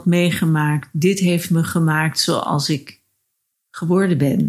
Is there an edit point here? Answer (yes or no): no